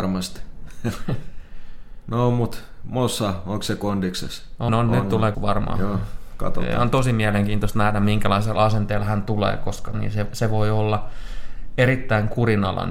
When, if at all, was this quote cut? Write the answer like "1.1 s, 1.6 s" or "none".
4.7 s, 5.3 s, 9.9 s